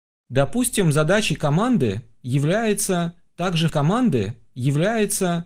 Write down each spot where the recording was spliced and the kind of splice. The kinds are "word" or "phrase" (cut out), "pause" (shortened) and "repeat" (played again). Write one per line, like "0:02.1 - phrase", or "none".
0:03.7 - repeat